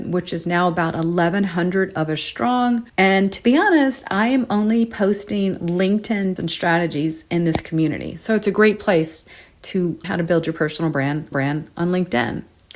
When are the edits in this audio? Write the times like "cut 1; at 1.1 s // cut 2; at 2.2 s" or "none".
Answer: cut 1; at 2.9 s // cut 2; at 6.4 s // cut 3; at 10.0 s // cut 4; at 11.3 s

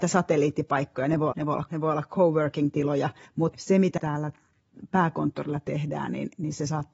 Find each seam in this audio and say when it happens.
cut 1; at 1.3 s // cut 2; at 1.7 s // cut 3; at 3.3 s // cut 4; at 4.0 s

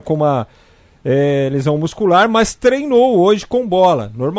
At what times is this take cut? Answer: none

